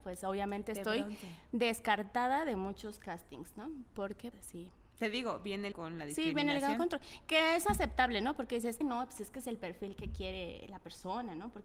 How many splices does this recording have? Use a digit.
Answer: 3